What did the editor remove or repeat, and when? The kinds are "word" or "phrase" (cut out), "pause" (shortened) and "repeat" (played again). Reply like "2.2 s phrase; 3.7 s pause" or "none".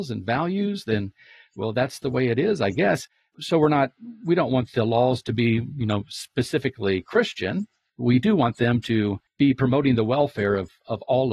none